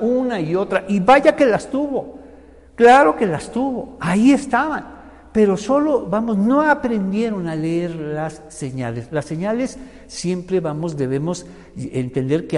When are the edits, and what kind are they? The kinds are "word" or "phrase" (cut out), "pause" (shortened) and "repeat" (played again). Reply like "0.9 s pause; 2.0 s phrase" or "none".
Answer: none